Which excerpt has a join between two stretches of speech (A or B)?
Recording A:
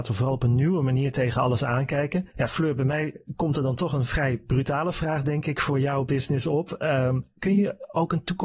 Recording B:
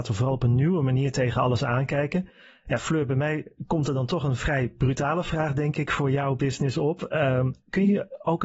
A